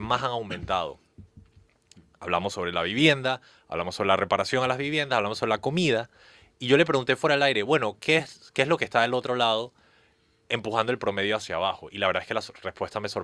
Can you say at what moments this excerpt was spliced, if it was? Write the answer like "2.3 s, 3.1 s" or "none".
none